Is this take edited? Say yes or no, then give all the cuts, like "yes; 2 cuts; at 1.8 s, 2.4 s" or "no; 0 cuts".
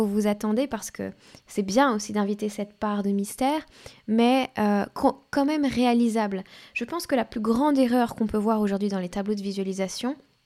no; 0 cuts